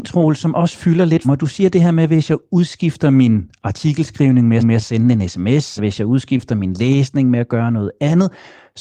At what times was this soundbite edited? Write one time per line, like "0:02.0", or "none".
0:01.2
0:04.6
0:05.8